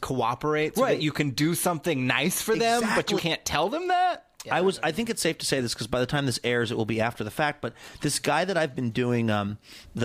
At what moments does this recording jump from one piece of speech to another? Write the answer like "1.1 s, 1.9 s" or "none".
3.2 s